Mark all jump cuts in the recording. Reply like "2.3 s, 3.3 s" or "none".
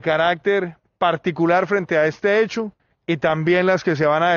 2.8 s